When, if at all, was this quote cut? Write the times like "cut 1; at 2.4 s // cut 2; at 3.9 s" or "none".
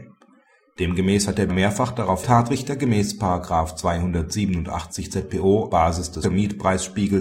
cut 1; at 1.5 s // cut 2; at 2.2 s // cut 3; at 5.7 s // cut 4; at 6.2 s